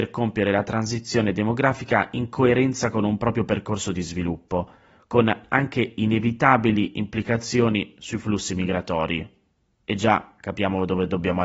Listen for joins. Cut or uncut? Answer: uncut